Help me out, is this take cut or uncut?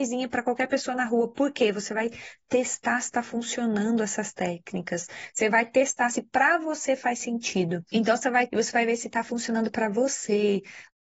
cut